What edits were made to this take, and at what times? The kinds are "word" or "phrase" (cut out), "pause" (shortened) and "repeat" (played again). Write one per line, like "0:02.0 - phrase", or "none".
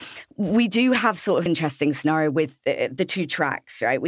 0:01.5 - phrase